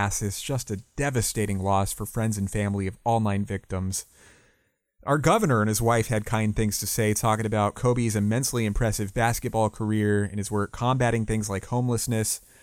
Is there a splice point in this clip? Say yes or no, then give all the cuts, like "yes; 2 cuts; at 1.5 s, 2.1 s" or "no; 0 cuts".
no; 0 cuts